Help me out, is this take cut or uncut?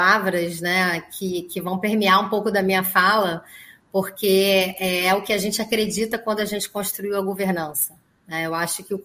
uncut